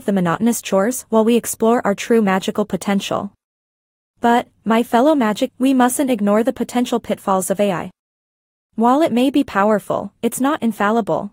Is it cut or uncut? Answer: cut